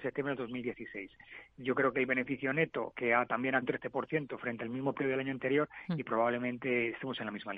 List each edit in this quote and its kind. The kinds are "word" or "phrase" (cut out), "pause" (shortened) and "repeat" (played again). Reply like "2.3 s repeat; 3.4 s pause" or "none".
3.6 s word